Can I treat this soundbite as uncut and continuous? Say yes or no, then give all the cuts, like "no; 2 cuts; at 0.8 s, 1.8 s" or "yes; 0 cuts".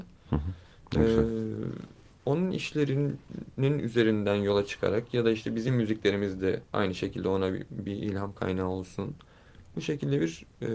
yes; 0 cuts